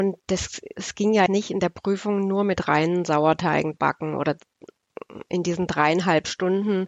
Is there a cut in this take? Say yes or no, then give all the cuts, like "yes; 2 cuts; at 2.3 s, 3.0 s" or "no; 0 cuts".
yes; 2 cuts; at 1.3 s, 3.7 s